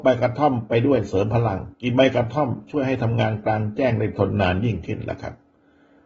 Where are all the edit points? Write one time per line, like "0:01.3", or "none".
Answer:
0:01.7